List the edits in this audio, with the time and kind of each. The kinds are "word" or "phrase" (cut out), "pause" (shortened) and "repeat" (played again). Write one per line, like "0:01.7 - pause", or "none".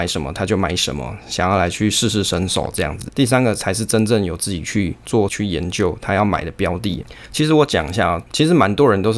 0:05.3 - word